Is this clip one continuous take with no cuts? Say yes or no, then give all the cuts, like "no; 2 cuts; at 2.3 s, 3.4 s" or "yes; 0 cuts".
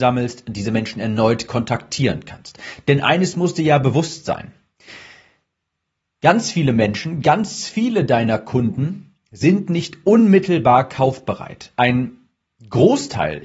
yes; 0 cuts